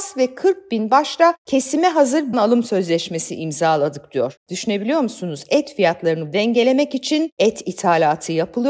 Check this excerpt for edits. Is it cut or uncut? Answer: cut